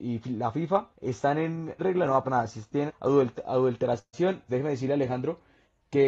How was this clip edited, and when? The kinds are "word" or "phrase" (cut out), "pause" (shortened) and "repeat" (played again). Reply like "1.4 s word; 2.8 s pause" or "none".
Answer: 0.9 s pause; 1.8 s phrase; 2.2 s word; 2.9 s word; 4.5 s word